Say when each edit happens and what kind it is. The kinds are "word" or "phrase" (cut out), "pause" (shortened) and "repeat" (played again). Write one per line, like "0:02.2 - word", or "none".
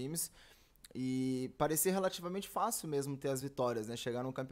none